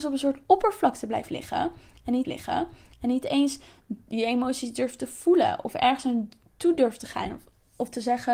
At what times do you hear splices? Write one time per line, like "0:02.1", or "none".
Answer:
0:02.2